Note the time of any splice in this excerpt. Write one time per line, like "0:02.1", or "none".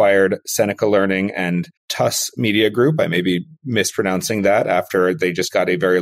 0:01.8